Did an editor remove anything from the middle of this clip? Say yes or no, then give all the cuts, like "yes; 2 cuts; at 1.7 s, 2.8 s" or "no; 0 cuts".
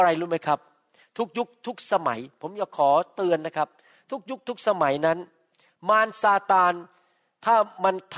no; 0 cuts